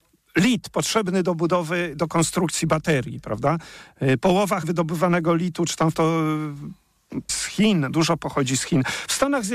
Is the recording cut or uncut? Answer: cut